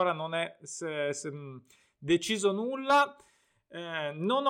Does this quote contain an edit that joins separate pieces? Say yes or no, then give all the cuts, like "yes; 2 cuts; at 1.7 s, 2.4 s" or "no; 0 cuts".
no; 0 cuts